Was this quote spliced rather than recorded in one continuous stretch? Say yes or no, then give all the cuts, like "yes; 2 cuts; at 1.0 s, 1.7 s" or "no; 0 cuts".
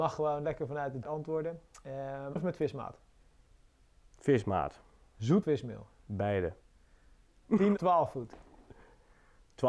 yes; 4 cuts; at 1.0 s, 2.4 s, 5.4 s, 7.8 s